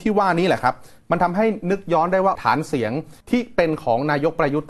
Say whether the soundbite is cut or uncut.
cut